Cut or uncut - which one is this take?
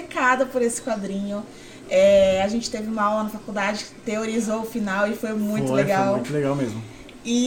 uncut